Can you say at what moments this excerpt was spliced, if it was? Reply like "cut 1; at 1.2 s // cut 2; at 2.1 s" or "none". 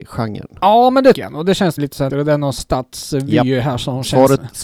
cut 1; at 1.1 s // cut 2; at 1.8 s // cut 3; at 2.1 s // cut 4; at 2.6 s